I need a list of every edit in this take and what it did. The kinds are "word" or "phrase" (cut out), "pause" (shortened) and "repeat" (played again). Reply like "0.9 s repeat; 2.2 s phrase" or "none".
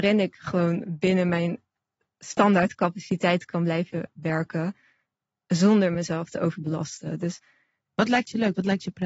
none